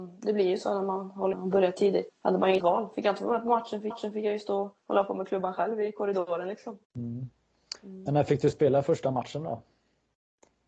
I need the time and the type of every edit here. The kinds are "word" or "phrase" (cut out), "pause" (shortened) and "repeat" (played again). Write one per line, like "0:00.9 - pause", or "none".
0:01.3 - phrase
0:02.1 - word
0:02.6 - word
0:03.9 - repeat
0:04.8 - pause
0:06.8 - pause